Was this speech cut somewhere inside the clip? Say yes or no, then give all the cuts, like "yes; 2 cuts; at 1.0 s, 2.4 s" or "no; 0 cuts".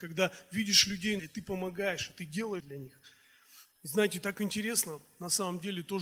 yes; 3 cuts; at 1.2 s, 2.6 s, 3.7 s